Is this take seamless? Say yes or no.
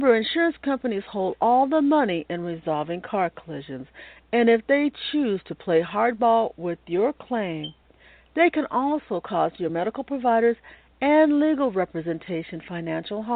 yes